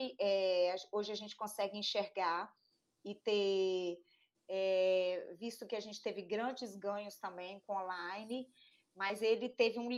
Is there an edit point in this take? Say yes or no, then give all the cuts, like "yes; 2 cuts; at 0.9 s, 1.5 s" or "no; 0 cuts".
no; 0 cuts